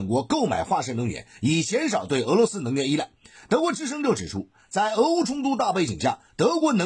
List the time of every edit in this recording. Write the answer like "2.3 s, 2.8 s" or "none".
none